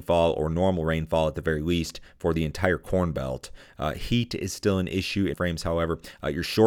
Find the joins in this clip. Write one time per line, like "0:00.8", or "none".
0:05.3

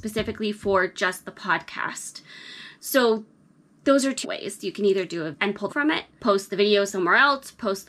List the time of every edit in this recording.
0:04.2
0:05.3
0:05.7

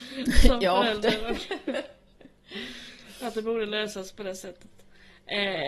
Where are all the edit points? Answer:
none

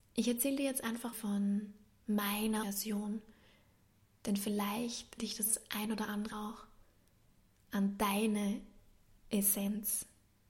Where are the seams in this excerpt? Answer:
0:01.1
0:02.6
0:05.2
0:06.3

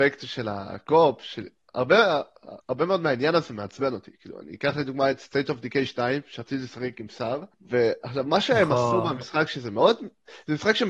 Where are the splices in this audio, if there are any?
0:02.6
0:07.5

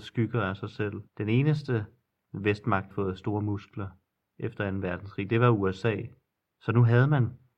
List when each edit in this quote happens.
0:01.1
0:02.9
0:06.3

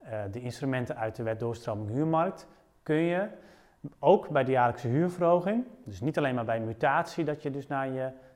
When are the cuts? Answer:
none

